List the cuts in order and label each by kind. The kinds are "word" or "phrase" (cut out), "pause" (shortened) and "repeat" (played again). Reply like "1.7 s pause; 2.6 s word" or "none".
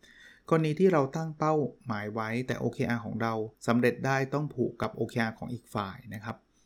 3.5 s pause